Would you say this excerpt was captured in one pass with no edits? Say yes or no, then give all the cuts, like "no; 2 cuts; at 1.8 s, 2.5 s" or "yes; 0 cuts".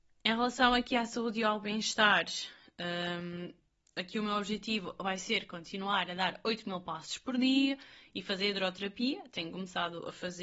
yes; 0 cuts